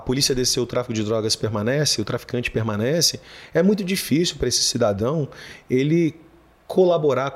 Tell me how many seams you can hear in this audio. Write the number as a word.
zero